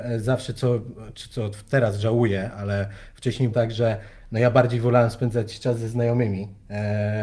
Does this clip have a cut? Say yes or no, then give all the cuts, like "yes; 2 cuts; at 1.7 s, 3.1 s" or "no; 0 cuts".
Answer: yes; 1 cut; at 3.5 s